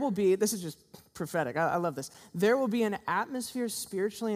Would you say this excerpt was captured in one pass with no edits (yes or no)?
yes